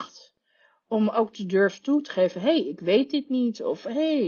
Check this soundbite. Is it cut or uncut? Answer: uncut